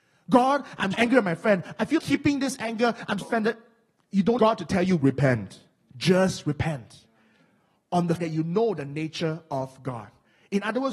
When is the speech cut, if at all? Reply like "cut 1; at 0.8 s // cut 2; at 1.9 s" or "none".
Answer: cut 1; at 0.9 s // cut 2; at 2.0 s // cut 3; at 3.2 s // cut 4; at 4.4 s // cut 5; at 8.2 s